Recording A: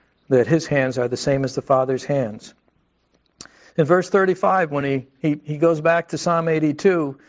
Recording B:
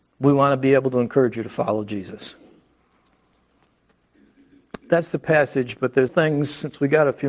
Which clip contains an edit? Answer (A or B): B